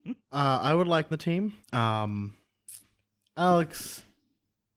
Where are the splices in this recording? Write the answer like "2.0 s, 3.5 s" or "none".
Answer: 1.1 s, 1.6 s